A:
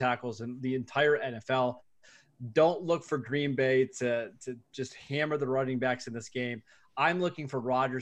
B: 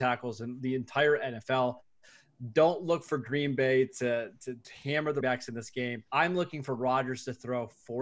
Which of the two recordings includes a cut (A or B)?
B